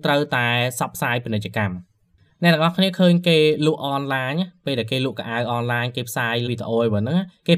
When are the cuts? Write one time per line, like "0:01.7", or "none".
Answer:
0:06.5